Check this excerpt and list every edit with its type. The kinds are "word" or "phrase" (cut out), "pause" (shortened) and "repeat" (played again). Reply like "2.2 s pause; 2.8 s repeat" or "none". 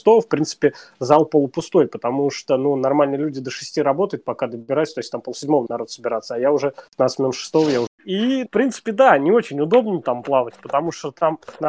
5.7 s word; 6.9 s pause; 8.5 s word